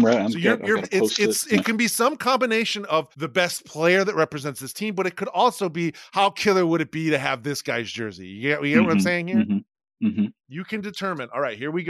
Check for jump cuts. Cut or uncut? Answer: cut